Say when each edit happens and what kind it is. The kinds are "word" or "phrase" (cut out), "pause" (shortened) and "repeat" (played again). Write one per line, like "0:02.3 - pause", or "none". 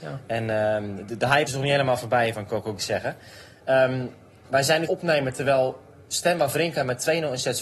0:01.5 - word
0:02.3 - word
0:02.8 - phrase
0:04.9 - phrase